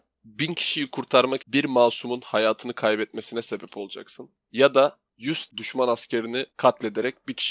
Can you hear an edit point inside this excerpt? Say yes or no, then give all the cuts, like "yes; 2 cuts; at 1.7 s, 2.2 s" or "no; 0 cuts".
yes; 3 cuts; at 1.4 s, 5.5 s, 6.5 s